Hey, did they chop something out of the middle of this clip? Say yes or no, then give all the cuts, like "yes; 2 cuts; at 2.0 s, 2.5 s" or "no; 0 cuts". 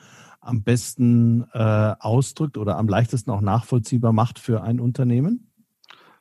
no; 0 cuts